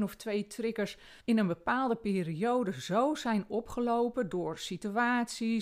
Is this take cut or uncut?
cut